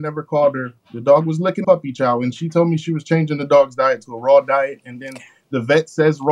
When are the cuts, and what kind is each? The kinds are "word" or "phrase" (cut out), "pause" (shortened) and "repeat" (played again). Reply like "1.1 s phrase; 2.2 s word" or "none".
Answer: 1.6 s phrase